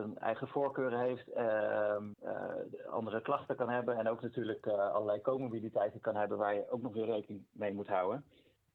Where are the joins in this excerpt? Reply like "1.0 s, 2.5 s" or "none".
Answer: 2.1 s